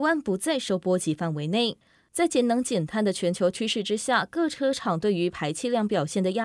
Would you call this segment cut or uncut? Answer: uncut